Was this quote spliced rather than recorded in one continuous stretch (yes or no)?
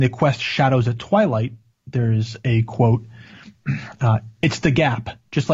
no